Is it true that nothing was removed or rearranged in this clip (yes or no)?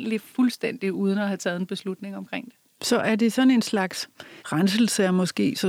no